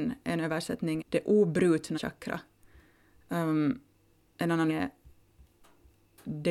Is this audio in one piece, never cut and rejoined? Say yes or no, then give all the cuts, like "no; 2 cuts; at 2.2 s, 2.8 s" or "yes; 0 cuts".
no; 3 cuts; at 1.0 s, 1.9 s, 4.7 s